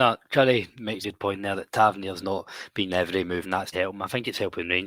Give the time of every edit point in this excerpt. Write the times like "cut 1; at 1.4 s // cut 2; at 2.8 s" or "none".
cut 1; at 1.0 s // cut 2; at 2.2 s // cut 3; at 2.9 s // cut 4; at 3.4 s // cut 5; at 3.7 s